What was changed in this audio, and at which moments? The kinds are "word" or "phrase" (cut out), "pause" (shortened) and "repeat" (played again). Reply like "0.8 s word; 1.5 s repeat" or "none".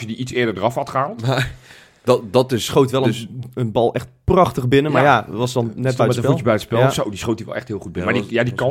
none